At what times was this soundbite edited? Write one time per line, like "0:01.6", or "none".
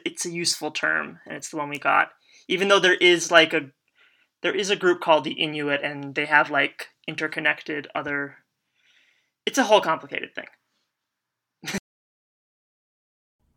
none